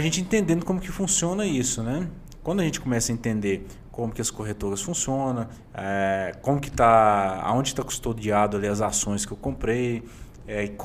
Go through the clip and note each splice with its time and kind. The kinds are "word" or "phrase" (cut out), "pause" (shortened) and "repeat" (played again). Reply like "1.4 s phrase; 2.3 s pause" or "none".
none